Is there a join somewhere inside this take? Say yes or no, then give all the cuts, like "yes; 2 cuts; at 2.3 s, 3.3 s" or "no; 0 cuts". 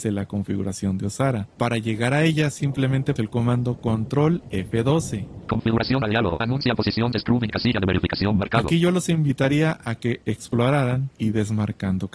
yes; 4 cuts; at 3.2 s, 6.0 s, 7.1 s, 11.1 s